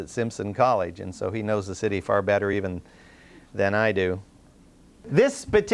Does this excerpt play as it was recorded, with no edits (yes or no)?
yes